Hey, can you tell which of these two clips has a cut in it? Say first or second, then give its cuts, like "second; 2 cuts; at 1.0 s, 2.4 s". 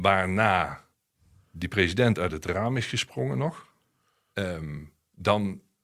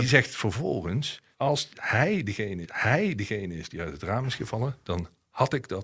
second; 2 cuts; at 1.3 s, 2.6 s